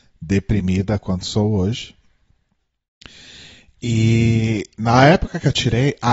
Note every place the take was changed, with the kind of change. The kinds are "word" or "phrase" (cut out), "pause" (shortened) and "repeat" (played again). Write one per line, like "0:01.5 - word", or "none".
none